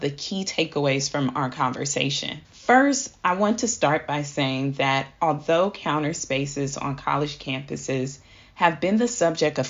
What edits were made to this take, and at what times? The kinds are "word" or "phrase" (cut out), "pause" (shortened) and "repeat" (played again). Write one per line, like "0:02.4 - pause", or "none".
0:02.4 - pause